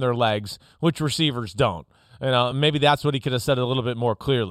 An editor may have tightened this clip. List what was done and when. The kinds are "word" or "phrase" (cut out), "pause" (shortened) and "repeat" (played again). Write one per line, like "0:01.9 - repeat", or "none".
none